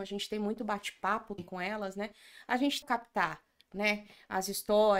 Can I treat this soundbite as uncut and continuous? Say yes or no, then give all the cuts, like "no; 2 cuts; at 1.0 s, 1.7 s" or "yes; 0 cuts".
no; 2 cuts; at 1.4 s, 2.8 s